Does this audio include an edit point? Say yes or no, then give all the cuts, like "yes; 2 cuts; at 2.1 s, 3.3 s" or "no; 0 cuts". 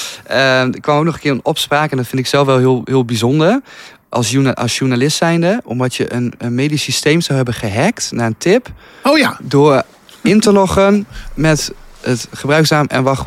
no; 0 cuts